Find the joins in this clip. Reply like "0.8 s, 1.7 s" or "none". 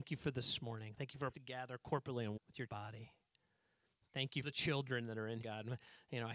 1.3 s, 2.4 s, 2.7 s, 4.4 s, 5.4 s